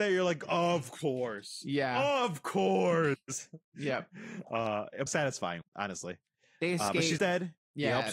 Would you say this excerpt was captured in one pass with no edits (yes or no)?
no